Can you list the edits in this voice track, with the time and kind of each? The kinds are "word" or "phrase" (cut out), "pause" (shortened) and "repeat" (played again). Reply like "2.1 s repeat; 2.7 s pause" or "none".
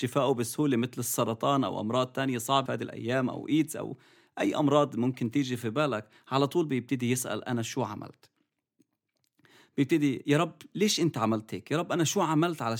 2.7 s phrase